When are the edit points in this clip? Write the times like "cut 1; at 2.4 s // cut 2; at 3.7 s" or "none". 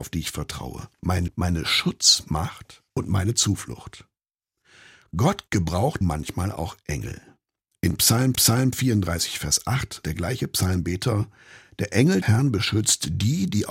cut 1; at 1.3 s // cut 2; at 2.9 s // cut 3; at 6.0 s // cut 4; at 8.3 s // cut 5; at 10.0 s // cut 6; at 12.2 s

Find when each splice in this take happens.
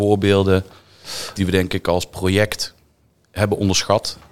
cut 1; at 1.4 s

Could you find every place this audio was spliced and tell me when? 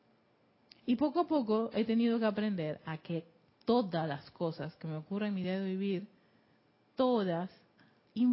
none

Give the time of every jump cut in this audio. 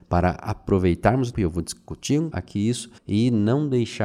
cut 1; at 1.3 s // cut 2; at 2.3 s // cut 3; at 3.0 s

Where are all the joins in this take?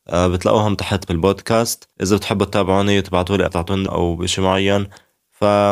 cut 1; at 1.1 s // cut 2; at 1.9 s // cut 3; at 3.5 s // cut 4; at 3.9 s

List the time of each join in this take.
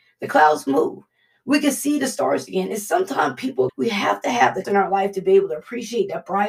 cut 1; at 3.7 s // cut 2; at 4.6 s

